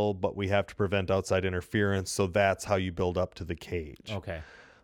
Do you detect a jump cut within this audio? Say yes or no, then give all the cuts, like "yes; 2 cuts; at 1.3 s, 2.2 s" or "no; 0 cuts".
no; 0 cuts